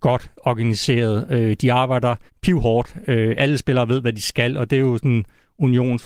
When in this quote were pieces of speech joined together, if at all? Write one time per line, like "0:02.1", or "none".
0:02.3